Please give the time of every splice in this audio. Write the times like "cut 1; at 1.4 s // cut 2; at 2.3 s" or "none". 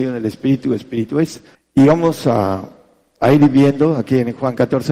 cut 1; at 1.5 s